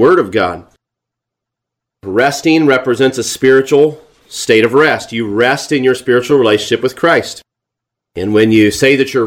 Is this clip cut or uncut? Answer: uncut